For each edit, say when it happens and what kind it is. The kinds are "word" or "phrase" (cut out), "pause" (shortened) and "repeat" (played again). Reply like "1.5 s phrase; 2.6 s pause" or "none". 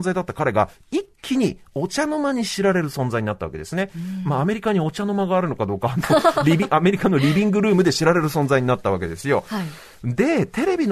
none